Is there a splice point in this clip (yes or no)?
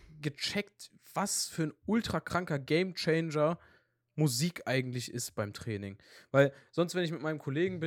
no